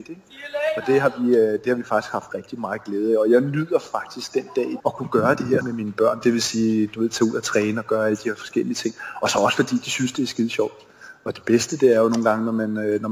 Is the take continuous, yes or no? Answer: no